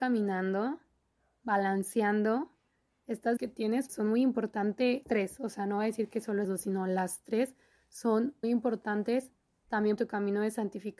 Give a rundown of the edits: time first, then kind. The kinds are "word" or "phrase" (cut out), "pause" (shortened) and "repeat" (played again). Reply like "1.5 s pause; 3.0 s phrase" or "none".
3.4 s word; 3.9 s word; 5.0 s word; 6.4 s word; 8.4 s word; 10.0 s word